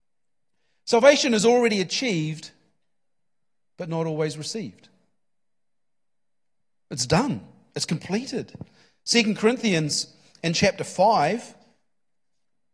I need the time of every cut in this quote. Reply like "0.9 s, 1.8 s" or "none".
none

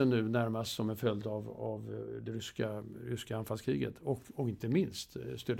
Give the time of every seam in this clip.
none

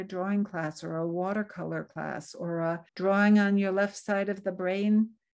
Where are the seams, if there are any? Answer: 2.9 s

